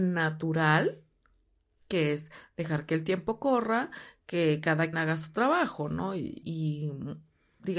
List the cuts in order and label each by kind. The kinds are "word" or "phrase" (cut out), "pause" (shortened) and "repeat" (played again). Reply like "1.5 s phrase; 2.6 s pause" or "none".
4.9 s word; 6.4 s word